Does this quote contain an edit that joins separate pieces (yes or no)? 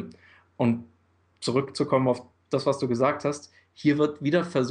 no